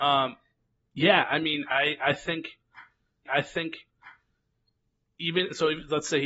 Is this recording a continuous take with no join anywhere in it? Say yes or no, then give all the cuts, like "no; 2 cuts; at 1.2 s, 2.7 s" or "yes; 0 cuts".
no; 1 cut; at 3.3 s